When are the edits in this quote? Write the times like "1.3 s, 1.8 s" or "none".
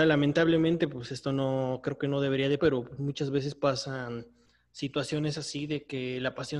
2.6 s

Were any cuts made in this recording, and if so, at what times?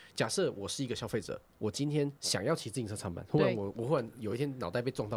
2.2 s

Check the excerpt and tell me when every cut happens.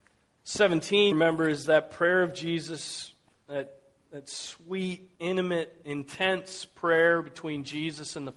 1.1 s, 5.2 s

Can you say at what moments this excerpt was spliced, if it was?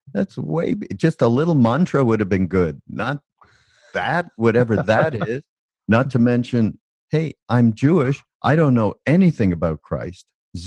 none

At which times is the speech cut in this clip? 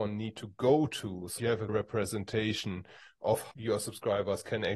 1.4 s, 1.7 s, 3.5 s

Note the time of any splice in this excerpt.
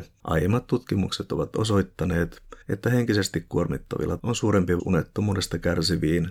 2.6 s, 4.2 s, 4.8 s

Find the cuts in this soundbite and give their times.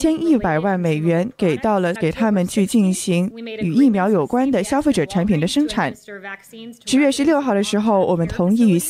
2.0 s

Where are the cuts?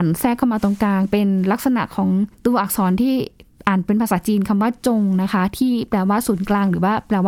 2.3 s, 3.5 s

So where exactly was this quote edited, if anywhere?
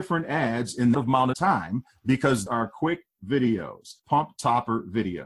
0.9 s, 1.3 s, 2.5 s, 4.0 s

